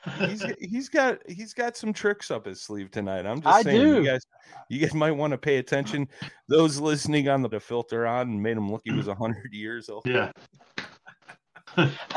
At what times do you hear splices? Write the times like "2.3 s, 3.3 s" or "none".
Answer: 4.9 s, 7.5 s, 8.8 s